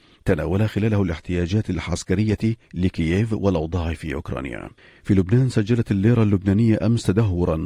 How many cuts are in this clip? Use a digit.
2